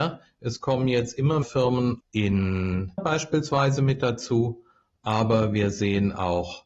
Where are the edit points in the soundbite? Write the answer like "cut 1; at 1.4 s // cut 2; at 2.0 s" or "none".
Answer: cut 1; at 1.4 s // cut 2; at 2.0 s // cut 3; at 3.0 s